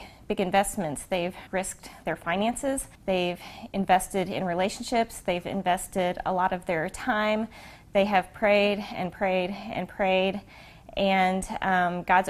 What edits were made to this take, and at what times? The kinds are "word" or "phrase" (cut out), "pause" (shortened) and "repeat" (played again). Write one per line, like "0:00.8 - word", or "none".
0:01.5 - pause
0:02.9 - pause